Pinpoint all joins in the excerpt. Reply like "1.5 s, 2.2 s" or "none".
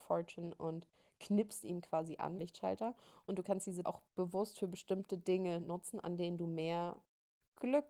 2.4 s, 3.8 s